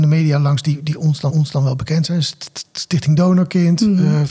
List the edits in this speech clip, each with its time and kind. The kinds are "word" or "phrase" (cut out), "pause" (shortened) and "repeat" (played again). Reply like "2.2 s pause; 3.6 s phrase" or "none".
1.3 s repeat